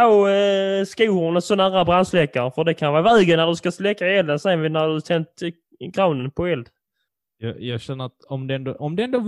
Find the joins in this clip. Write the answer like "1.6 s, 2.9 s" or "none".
7.1 s